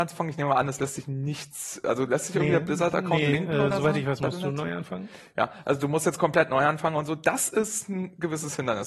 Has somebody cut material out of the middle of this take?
no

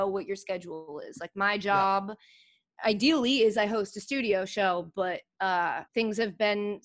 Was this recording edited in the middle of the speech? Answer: yes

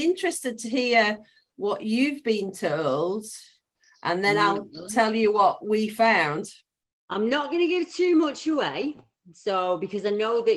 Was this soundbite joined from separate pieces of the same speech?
no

